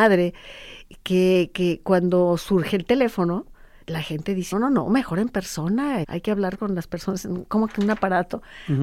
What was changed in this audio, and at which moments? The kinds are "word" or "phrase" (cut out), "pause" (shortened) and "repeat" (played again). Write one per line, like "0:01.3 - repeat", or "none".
0:03.8 - word
0:04.5 - word
0:06.0 - word